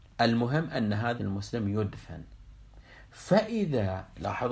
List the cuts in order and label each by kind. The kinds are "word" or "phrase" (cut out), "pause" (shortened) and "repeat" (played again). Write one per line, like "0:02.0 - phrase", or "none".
0:01.2 - word